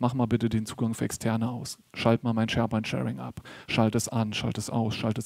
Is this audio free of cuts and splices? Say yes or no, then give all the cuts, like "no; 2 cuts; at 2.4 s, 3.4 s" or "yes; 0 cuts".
yes; 0 cuts